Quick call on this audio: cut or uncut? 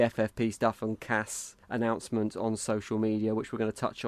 cut